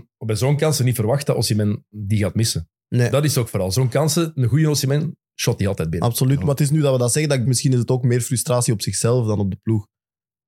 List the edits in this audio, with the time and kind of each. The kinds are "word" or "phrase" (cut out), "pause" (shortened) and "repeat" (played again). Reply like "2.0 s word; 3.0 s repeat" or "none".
7.4 s word